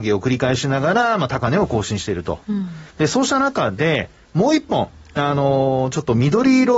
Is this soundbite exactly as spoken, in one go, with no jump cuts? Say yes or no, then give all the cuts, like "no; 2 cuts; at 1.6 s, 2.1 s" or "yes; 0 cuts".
no; 1 cut; at 2.9 s